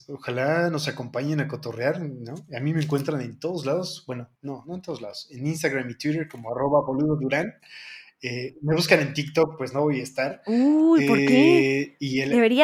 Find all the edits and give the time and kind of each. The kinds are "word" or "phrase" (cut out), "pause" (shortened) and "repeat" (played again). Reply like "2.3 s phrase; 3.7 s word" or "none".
4.3 s pause